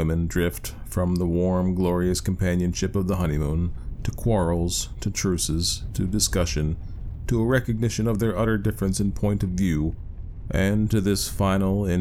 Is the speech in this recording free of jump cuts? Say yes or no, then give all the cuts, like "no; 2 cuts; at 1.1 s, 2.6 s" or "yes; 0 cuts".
yes; 0 cuts